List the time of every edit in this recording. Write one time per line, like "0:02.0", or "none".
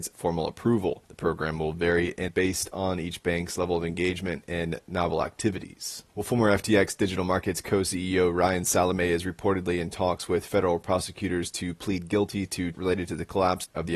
0:02.3
0:06.1
0:12.7